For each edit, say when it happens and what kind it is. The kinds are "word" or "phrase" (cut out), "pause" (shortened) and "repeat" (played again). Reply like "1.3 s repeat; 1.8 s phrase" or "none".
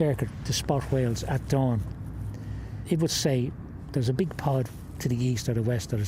none